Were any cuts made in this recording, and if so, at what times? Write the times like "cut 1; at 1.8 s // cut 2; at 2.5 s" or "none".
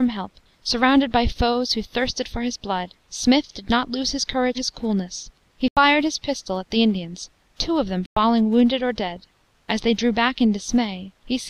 cut 1; at 4.5 s